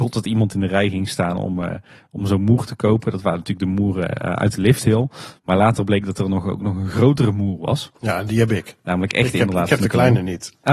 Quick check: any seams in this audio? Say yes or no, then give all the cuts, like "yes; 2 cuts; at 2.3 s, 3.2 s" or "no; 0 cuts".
no; 0 cuts